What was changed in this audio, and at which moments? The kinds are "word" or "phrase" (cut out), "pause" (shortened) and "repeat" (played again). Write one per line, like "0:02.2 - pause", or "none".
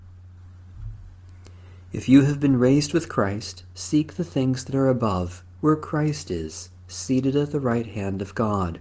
none